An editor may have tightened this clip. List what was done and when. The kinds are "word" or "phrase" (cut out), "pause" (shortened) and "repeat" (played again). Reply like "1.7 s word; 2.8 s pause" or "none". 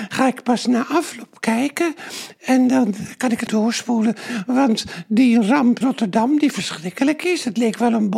3.5 s word; 5.8 s word